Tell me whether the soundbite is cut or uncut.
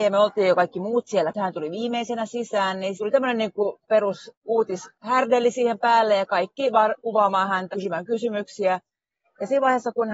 cut